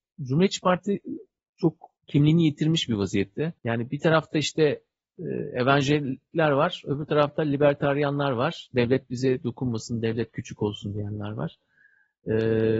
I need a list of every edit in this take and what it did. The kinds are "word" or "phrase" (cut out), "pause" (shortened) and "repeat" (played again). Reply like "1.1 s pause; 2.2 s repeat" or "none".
2.0 s pause; 3.6 s pause